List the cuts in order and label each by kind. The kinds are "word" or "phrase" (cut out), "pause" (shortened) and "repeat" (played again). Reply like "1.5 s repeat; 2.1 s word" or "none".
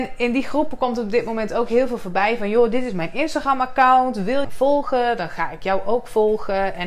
4.4 s phrase